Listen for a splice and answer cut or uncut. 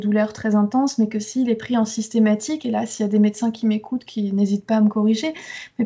uncut